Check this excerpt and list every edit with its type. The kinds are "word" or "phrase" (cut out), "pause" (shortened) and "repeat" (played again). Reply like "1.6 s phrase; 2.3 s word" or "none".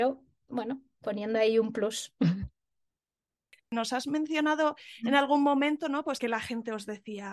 none